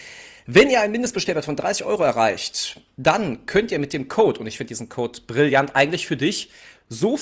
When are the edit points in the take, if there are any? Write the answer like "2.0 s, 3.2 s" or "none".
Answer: none